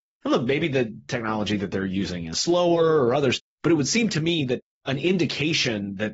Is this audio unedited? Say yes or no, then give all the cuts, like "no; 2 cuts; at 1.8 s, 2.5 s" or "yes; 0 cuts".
yes; 0 cuts